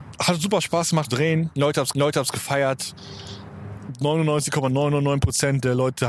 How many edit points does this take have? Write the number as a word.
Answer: two